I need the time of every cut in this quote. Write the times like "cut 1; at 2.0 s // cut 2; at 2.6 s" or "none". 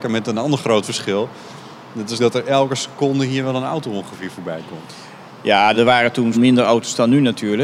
cut 1; at 2.2 s // cut 2; at 5.7 s // cut 3; at 6.3 s